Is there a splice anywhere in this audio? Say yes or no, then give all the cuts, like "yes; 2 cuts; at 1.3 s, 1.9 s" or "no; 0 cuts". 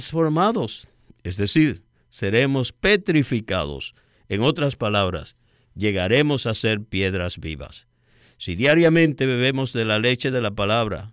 no; 0 cuts